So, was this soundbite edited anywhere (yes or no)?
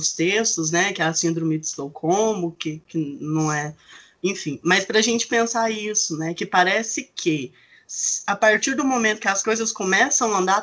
no